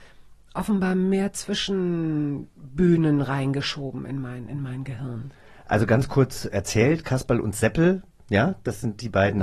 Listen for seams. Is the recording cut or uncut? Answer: uncut